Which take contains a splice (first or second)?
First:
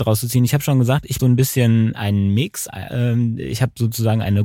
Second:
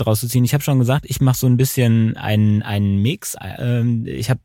first